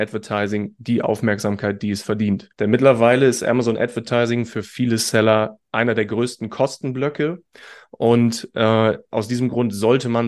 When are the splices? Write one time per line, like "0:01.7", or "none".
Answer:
0:02.5